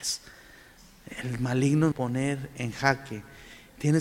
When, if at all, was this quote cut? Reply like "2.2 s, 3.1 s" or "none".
1.9 s